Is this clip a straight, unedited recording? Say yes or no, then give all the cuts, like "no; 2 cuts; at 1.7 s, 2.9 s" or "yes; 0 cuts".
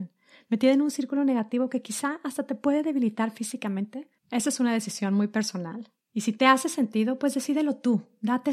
no; 2 cuts; at 4.2 s, 6.0 s